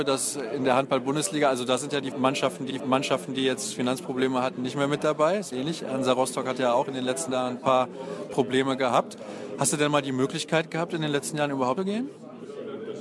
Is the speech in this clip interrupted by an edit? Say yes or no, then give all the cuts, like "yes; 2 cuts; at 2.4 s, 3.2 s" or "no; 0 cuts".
yes; 4 cuts; at 2.7 s, 5.5 s, 7.3 s, 11.8 s